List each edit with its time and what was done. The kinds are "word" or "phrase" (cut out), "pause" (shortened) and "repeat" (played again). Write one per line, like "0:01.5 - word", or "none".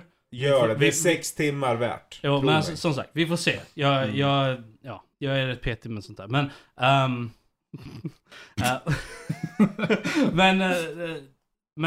0:05.1 - pause